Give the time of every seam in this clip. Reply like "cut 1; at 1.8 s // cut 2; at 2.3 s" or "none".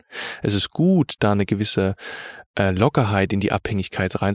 none